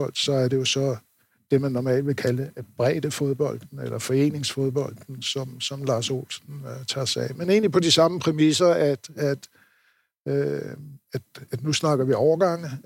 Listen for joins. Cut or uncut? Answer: uncut